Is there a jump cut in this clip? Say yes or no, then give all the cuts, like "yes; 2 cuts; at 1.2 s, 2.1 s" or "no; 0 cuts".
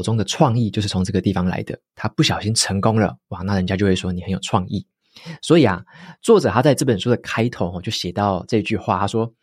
no; 0 cuts